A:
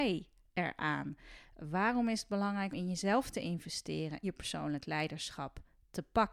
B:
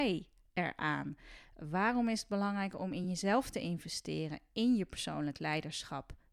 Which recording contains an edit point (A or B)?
A